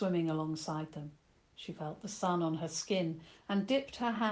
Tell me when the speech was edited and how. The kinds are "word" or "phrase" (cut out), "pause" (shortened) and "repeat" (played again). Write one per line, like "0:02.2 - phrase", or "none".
0:01.4 - pause